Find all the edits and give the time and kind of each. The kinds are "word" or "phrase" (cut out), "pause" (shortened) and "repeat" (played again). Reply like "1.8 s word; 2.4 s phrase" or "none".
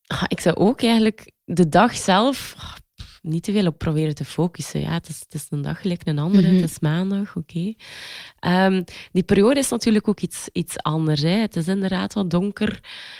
none